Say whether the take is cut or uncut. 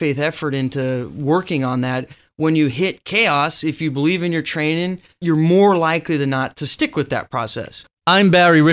uncut